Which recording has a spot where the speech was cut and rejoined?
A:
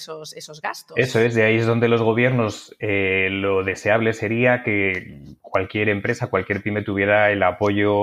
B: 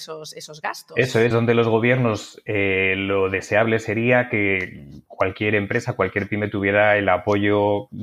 B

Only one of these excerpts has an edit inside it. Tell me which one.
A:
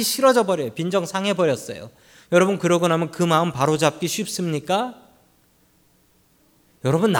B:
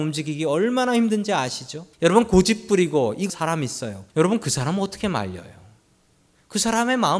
B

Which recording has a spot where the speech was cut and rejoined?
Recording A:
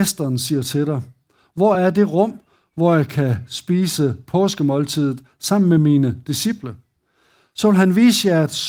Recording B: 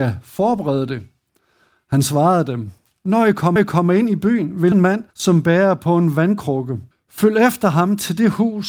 B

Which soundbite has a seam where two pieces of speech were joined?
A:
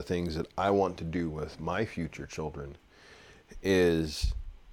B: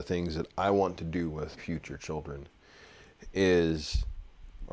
B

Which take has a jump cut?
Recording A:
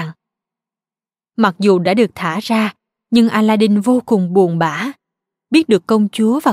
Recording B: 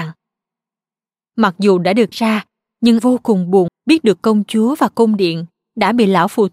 B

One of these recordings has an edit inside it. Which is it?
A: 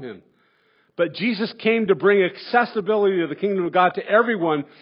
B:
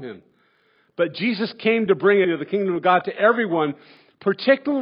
B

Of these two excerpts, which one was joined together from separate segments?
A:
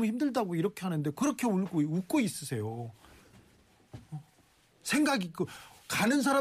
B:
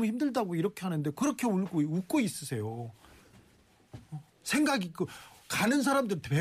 B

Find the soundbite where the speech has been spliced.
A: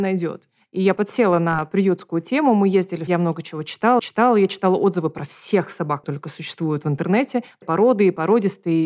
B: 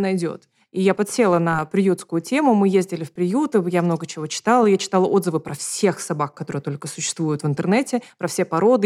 A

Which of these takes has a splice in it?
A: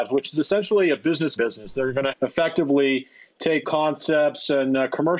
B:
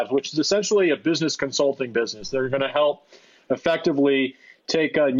A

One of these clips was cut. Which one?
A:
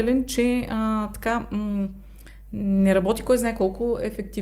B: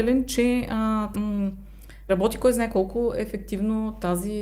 B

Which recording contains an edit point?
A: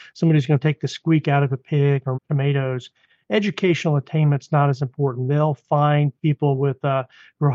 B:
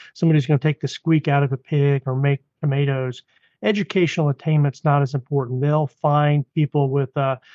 A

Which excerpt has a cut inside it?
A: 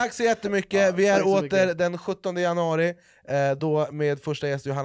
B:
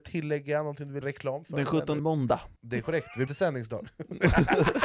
B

